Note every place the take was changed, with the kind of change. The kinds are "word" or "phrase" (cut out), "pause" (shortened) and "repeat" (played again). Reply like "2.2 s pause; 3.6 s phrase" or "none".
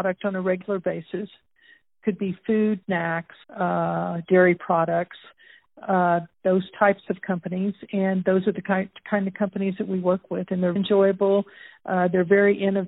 2.8 s word; 3.4 s pause; 6.3 s pause; 10.8 s word